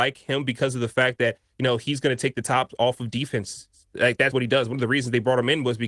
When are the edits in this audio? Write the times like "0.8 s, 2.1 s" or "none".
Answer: 4.3 s